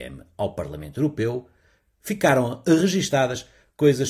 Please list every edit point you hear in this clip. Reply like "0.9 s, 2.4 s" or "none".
none